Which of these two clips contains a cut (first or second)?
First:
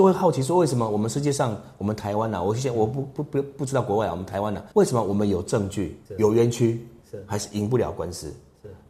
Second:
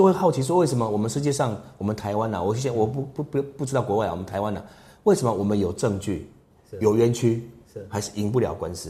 first